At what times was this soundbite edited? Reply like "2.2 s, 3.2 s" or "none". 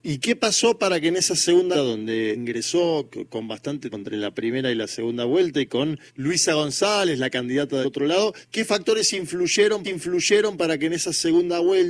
1.7 s, 2.3 s, 3.9 s, 6.1 s, 7.8 s, 8.4 s, 9.8 s